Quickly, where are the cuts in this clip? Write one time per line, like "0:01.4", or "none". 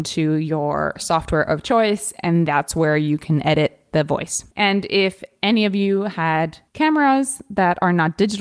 0:04.5
0:06.7